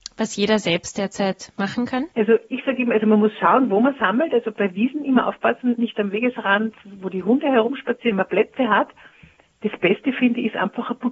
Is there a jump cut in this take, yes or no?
yes